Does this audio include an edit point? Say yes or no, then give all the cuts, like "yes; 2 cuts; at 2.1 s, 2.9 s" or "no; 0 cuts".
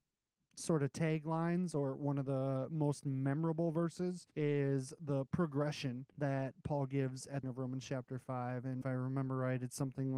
yes; 4 cuts; at 4.3 s, 6.1 s, 7.4 s, 8.8 s